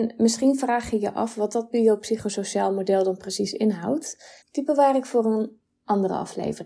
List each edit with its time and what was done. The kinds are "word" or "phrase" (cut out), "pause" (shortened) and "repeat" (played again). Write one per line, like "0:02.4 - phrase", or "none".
0:04.4 - pause